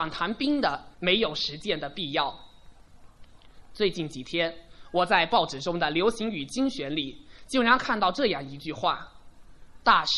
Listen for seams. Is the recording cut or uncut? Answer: cut